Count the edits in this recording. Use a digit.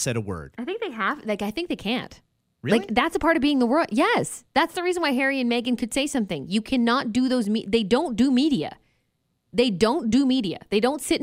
0